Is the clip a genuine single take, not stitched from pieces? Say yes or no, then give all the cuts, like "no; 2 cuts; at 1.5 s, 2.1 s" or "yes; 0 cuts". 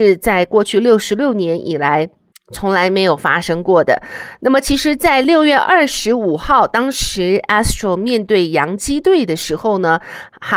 yes; 0 cuts